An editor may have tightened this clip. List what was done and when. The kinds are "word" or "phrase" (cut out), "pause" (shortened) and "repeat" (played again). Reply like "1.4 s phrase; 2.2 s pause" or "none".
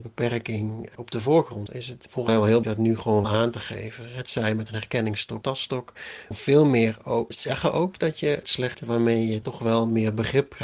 1.7 s word; 2.3 s word; 2.6 s word; 3.2 s word; 5.4 s word; 6.3 s word; 7.3 s word; 8.7 s word; 9.4 s word